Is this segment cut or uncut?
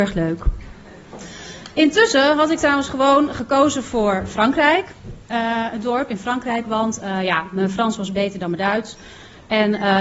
uncut